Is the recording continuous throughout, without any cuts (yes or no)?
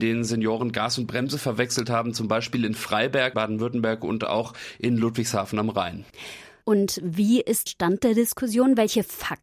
no